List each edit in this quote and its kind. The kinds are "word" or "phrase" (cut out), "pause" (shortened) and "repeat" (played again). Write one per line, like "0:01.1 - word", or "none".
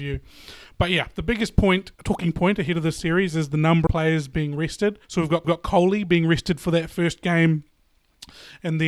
0:01.9 - word
0:03.9 - word
0:05.0 - pause
0:05.4 - repeat